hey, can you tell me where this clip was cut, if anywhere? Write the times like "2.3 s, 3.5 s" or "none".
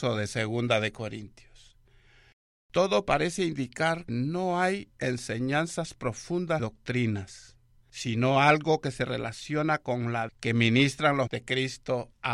4.1 s, 6.6 s, 10.3 s, 11.3 s